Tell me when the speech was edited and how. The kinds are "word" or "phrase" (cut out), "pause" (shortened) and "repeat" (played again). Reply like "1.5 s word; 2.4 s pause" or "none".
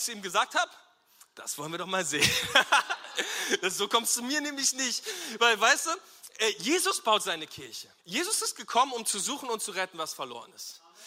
8.0 s pause